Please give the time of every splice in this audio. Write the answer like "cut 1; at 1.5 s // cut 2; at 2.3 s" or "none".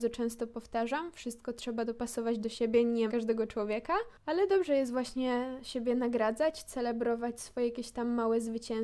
cut 1; at 3.1 s

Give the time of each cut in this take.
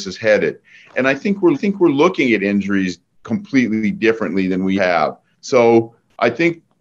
cut 1; at 1.5 s // cut 2; at 3.2 s // cut 3; at 4.8 s // cut 4; at 5.3 s

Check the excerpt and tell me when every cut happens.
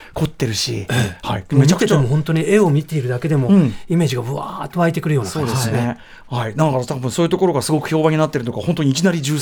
none

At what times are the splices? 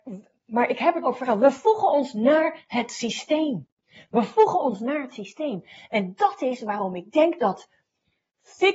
cut 1; at 1.0 s

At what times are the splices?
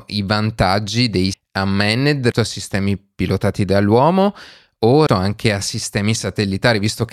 cut 1; at 1.3 s // cut 2; at 2.3 s // cut 3; at 5.1 s

